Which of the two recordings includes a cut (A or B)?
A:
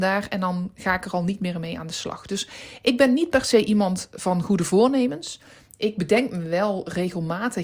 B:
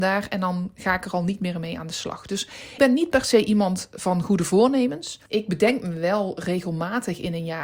B